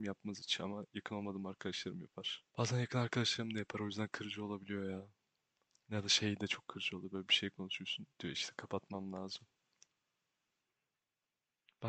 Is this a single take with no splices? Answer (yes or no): no